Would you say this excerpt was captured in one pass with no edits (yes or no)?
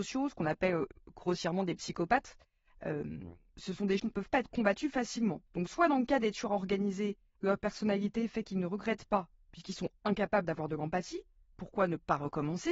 no